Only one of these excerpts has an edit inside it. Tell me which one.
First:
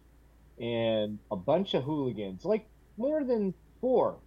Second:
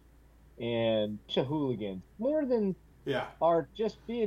second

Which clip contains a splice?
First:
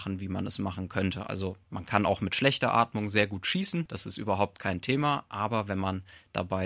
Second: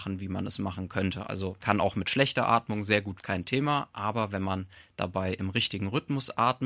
second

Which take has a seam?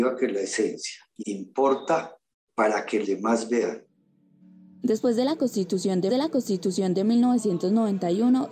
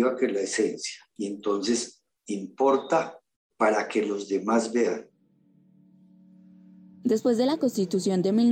first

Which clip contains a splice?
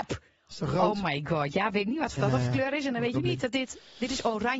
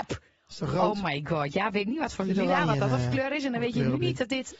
first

